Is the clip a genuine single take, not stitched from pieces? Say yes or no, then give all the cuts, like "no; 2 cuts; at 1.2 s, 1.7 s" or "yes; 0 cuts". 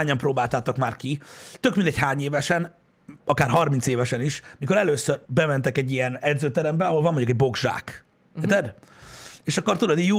no; 3 cuts; at 3.2 s, 5.2 s, 8.1 s